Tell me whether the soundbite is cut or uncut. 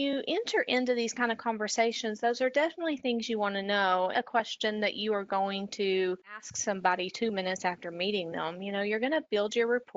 cut